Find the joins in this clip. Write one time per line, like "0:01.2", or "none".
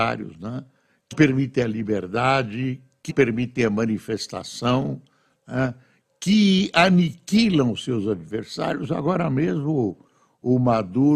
0:01.1
0:03.1

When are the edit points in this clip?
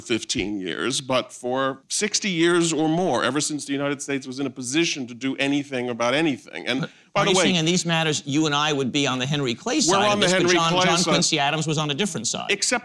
0:01.8

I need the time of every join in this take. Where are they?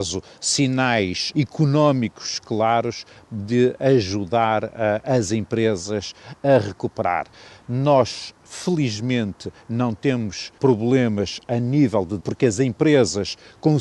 0:01.3
0:10.6
0:12.2

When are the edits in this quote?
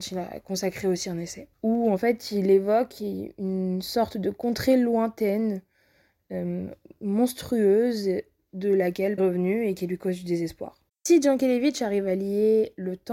0:01.5
0:09.2

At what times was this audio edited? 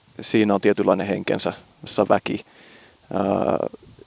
0:01.9

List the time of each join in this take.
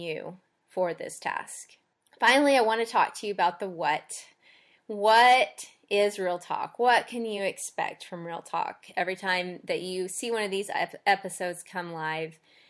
none

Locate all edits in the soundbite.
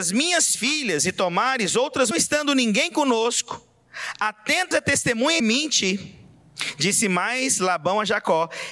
0:02.1
0:04.7
0:05.4

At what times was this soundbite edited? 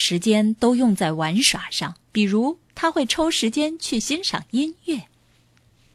0:02.0
0:02.7

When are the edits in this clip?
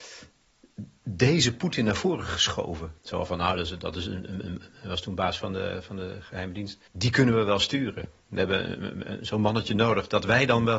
0:03.0
0:06.9

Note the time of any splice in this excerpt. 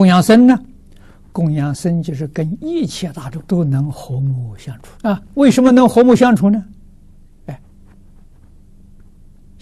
0:03.5
0:05.0

